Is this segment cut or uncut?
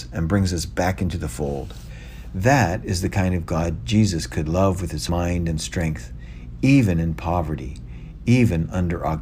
cut